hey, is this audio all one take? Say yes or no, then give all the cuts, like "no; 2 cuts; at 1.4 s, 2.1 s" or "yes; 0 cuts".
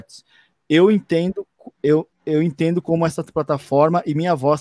yes; 0 cuts